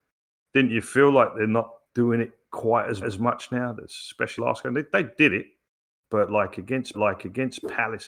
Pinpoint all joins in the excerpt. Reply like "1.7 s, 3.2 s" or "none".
1.8 s, 3.0 s, 4.4 s, 6.9 s